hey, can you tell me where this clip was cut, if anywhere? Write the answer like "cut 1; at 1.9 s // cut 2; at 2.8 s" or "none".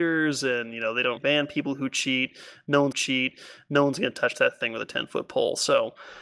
cut 1; at 1.2 s // cut 2; at 2.9 s